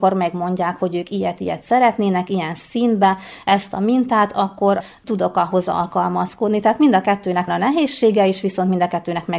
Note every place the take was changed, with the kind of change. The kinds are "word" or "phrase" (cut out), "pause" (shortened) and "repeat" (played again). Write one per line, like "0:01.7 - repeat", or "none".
0:07.5 - word